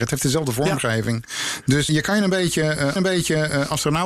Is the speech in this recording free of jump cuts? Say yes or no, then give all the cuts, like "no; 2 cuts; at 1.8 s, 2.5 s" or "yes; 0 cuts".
no; 2 cuts; at 1.9 s, 3.0 s